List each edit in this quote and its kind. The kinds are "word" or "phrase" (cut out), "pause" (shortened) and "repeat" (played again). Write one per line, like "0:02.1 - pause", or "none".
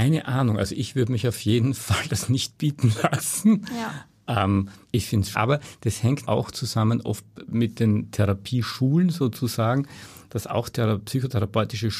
0:04.8 - pause
0:05.3 - word
0:06.2 - word

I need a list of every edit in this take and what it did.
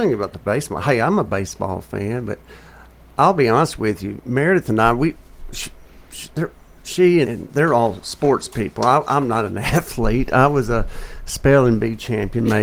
0:07.2 - word

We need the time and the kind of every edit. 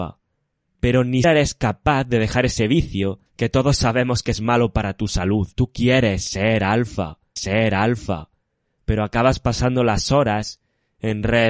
0:01.2 - word
0:03.3 - pause
0:05.5 - pause
0:07.4 - repeat

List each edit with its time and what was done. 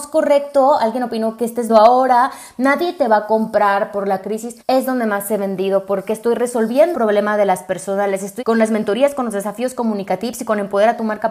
0:01.7 - word
0:04.6 - pause
0:06.9 - word
0:08.4 - word

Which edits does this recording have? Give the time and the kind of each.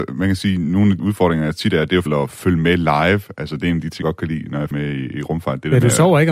0:01.0 - word
0:02.1 - word
0:04.0 - word
0:04.7 - word

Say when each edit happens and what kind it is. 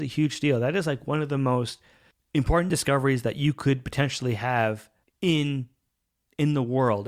none

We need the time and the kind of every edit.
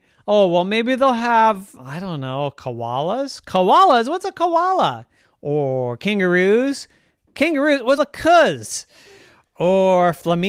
0:01.8 - word
0:05.2 - pause
0:08.0 - phrase

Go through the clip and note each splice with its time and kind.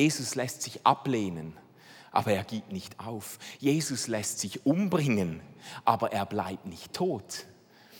none

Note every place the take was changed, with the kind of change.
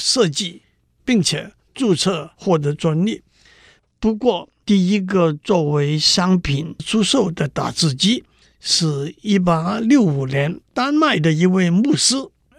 0:10.7 - pause

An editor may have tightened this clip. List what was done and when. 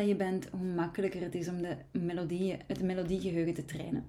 0:02.7 - word

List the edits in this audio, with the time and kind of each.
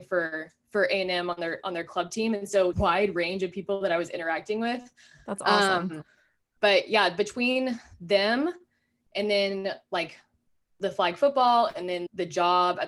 0:02.7 - phrase

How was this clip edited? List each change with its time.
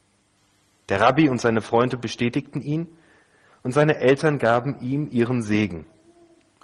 none

